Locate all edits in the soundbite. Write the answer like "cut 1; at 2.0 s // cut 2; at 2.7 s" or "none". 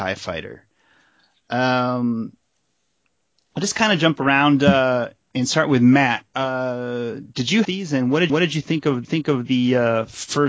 cut 1; at 5.2 s // cut 2; at 7.6 s // cut 3; at 8.3 s // cut 4; at 9.0 s